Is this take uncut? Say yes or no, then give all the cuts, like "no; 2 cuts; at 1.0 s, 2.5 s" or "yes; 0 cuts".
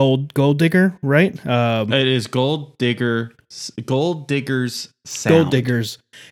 yes; 0 cuts